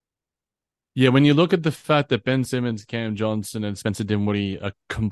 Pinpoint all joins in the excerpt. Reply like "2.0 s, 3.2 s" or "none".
none